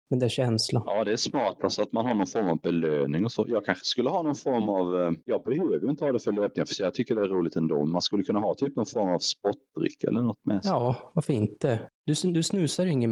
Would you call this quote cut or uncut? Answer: cut